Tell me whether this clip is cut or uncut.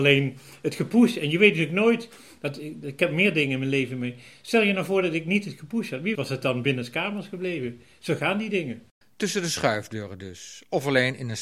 cut